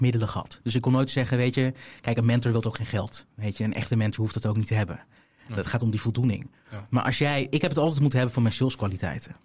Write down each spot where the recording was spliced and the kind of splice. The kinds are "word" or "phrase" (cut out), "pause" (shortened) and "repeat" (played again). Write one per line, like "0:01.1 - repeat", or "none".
none